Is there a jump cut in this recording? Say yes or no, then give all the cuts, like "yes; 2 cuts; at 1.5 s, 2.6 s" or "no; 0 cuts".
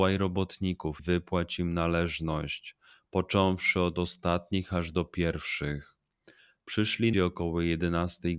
yes; 2 cuts; at 1.0 s, 7.1 s